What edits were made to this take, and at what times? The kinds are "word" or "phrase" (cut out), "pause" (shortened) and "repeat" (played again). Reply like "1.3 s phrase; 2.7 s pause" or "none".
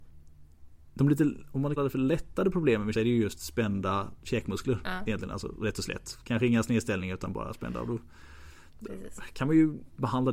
1.8 s word; 2.9 s word